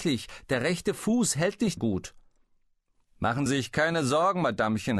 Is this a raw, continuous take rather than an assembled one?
no; 2 cuts; at 1.8 s, 3.5 s

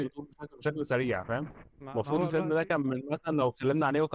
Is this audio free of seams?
yes; 0 cuts

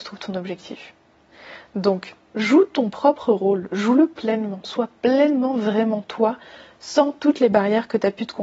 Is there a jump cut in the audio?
no; 0 cuts

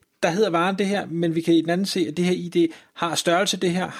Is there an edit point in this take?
no; 0 cuts

